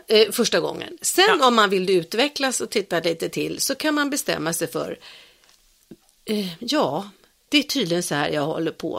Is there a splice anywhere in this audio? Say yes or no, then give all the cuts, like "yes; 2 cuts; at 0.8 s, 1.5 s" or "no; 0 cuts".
no; 0 cuts